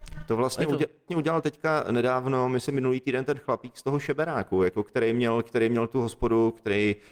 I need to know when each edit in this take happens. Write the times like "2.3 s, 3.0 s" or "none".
1.1 s